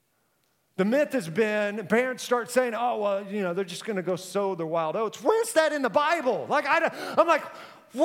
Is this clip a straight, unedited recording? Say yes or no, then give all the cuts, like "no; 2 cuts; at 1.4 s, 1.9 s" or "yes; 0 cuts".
yes; 0 cuts